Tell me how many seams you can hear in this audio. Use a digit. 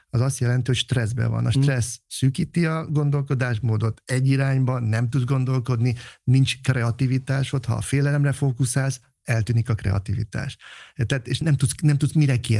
1